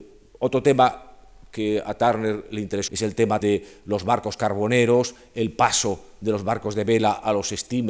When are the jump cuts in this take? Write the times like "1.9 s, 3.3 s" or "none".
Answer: 2.9 s, 3.4 s